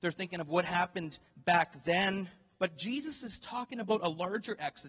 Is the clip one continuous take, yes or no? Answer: yes